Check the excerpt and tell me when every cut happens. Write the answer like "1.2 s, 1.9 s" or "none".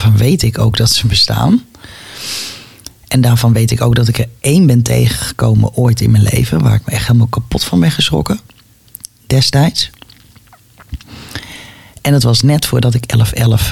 none